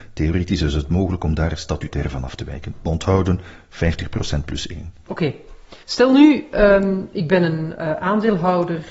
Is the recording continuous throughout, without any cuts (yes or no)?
no